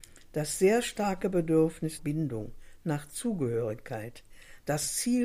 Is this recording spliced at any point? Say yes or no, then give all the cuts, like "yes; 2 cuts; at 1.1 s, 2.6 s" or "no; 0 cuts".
yes; 1 cut; at 2.0 s